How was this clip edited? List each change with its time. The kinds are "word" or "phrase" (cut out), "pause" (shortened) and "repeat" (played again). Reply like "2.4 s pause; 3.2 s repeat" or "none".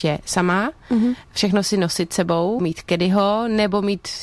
2.6 s word